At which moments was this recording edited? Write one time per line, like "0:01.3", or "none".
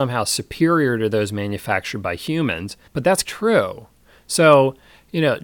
0:02.9
0:03.2

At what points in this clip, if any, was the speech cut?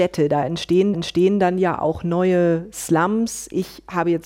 0:00.9

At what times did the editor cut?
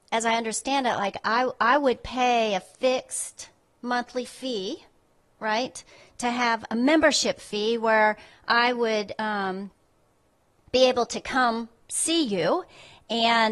none

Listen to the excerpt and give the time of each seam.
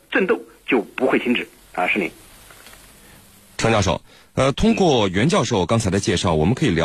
none

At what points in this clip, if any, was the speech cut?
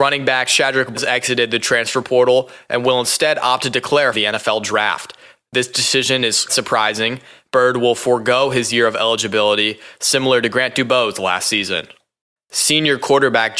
0:00.9
0:04.1
0:06.5

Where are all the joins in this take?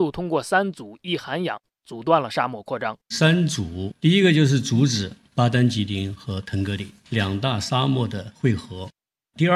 0:03.0

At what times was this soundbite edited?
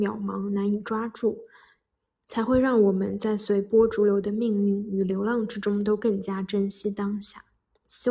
none

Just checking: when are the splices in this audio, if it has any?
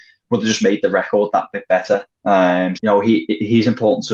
0:02.7

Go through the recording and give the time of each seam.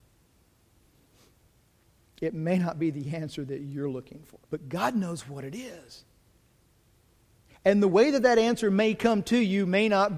0:04.4

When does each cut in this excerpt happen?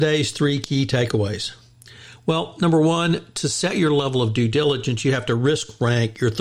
none

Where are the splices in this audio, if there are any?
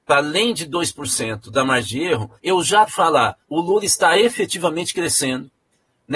0:02.4
0:02.9
0:03.4

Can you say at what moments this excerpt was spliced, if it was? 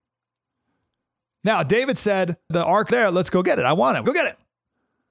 0:02.5
0:02.9
0:04.1

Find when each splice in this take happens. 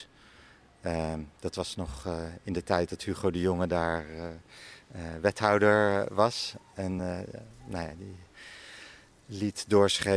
none

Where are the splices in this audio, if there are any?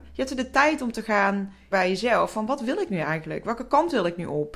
0:01.7

